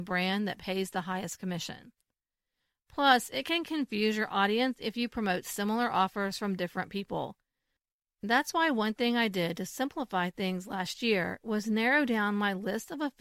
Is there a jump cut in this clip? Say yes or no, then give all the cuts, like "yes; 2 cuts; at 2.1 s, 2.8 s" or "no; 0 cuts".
no; 0 cuts